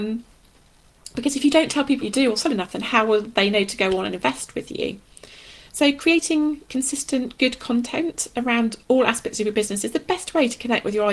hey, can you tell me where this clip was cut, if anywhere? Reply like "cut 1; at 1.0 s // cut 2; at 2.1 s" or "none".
cut 1; at 2.0 s